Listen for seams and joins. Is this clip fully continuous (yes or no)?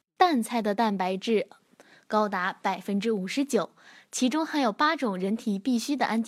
yes